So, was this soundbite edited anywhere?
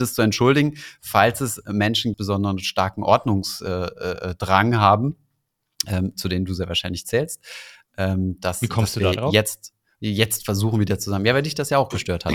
yes; 1 cut; at 2.1 s

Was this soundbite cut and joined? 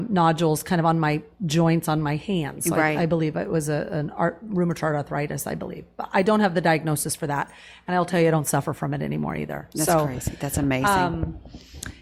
no; 0 cuts

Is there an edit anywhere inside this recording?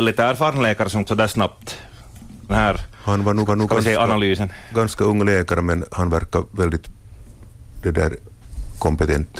yes; 3 cuts; at 1.1 s, 2.5 s, 3.5 s

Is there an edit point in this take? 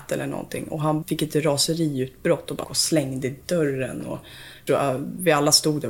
yes; 3 cuts; at 1.0 s, 2.6 s, 4.7 s

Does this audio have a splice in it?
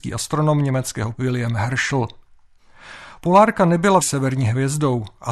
yes; 2 cuts; at 1.1 s, 4.0 s

